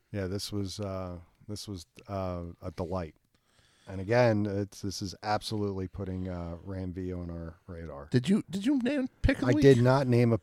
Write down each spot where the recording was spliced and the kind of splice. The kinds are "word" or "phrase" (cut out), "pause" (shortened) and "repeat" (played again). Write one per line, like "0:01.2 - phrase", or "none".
none